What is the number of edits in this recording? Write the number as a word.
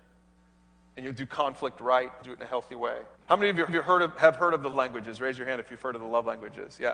four